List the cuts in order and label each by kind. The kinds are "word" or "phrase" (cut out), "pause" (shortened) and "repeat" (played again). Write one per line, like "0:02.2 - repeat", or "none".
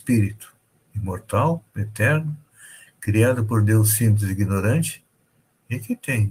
none